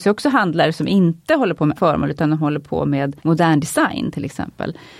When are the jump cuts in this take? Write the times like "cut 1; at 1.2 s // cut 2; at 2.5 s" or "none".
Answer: cut 1; at 1.8 s // cut 2; at 3.2 s

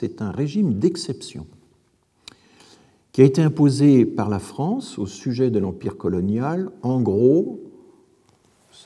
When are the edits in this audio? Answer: none

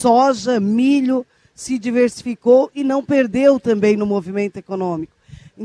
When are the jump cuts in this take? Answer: none

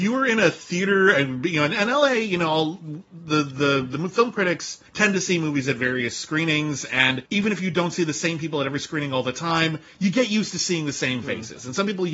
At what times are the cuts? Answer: cut 1; at 4.9 s // cut 2; at 7.3 s

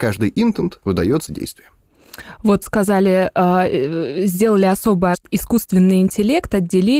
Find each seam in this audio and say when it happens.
cut 1; at 1.3 s // cut 2; at 2.6 s // cut 3; at 5.1 s

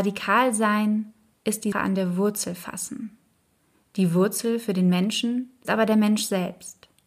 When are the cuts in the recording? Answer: cut 1; at 1.7 s // cut 2; at 5.6 s

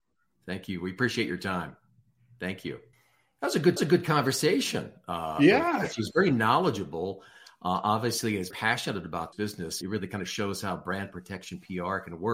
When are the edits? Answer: cut 1; at 2.9 s // cut 2; at 3.8 s // cut 3; at 8.5 s // cut 4; at 9.3 s // cut 5; at 9.8 s

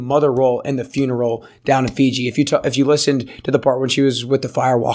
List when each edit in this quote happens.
none

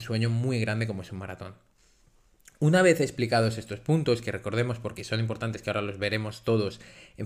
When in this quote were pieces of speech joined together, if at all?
none

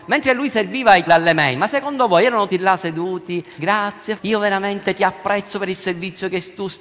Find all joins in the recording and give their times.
cut 1; at 1.1 s // cut 2; at 2.5 s // cut 3; at 3.6 s // cut 4; at 4.2 s

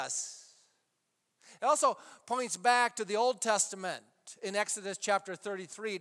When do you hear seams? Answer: none

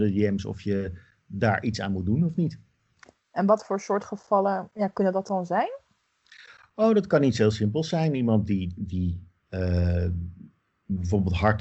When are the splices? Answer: none

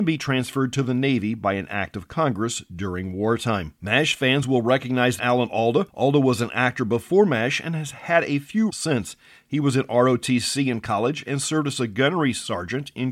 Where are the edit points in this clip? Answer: cut 1; at 3.8 s // cut 2; at 5.2 s // cut 3; at 5.9 s // cut 4; at 8.7 s

